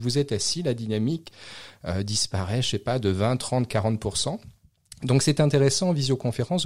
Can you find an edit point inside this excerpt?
no; 0 cuts

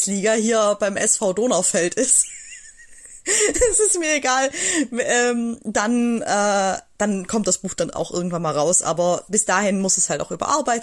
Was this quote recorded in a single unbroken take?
yes; 0 cuts

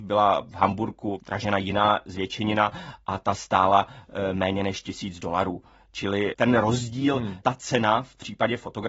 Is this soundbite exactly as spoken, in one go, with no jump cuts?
yes; 0 cuts

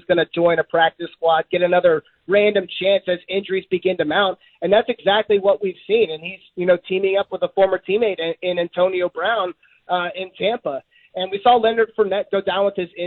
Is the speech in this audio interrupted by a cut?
no; 0 cuts

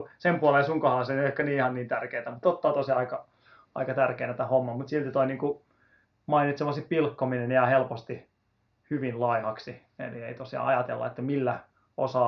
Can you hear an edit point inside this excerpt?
yes; 1 cut; at 2.4 s

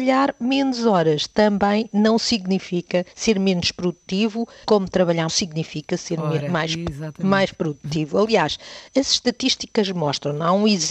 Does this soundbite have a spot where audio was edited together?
yes; 3 cuts; at 3.1 s, 4.6 s, 5.3 s

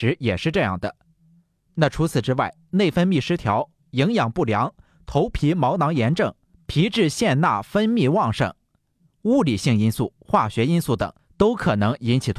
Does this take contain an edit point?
no; 0 cuts

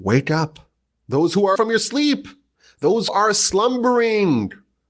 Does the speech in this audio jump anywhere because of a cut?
yes; 2 cuts; at 1.5 s, 3.1 s

